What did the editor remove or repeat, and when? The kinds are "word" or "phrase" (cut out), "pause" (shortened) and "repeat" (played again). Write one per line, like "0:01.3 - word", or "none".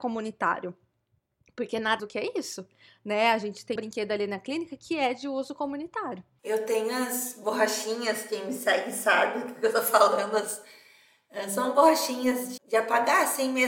0:02.0 - word
0:03.8 - word
0:12.6 - word